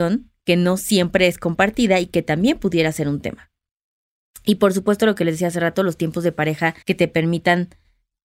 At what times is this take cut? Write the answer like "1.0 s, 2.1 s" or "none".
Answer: 6.8 s